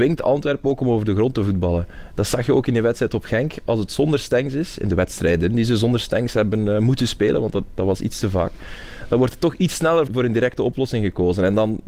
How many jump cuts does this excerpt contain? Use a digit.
1